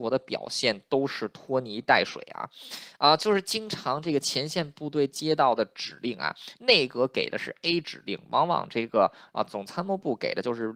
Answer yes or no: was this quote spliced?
no